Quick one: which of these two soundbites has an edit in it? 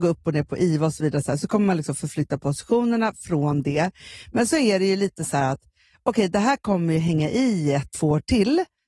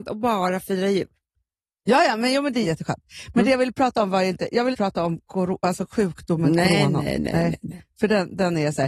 second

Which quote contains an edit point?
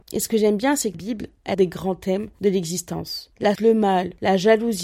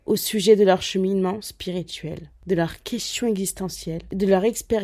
first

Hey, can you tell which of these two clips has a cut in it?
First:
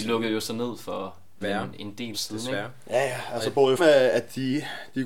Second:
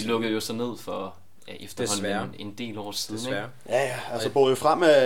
first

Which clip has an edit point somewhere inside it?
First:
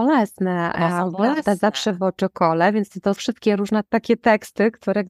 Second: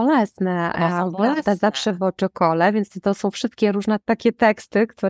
first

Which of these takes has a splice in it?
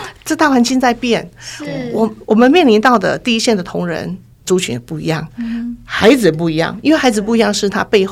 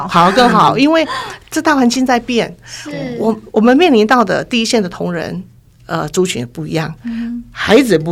first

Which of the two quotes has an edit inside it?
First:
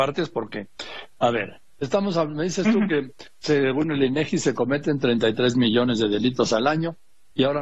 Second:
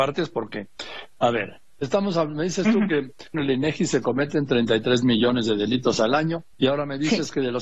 second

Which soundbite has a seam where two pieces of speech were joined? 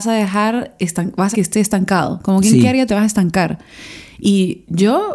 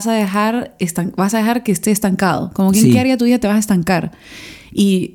first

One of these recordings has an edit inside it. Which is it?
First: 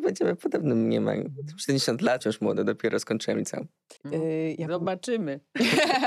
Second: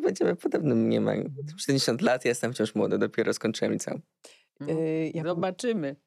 first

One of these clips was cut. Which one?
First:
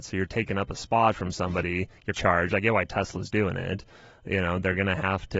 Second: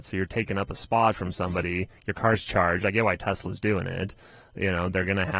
first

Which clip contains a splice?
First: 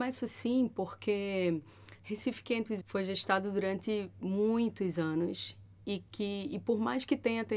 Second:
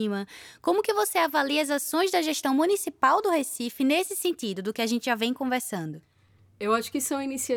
first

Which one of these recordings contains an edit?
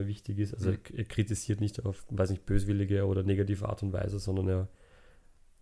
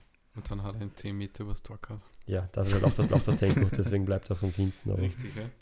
second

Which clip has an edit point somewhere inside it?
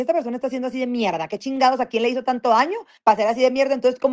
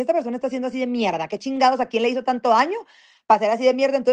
first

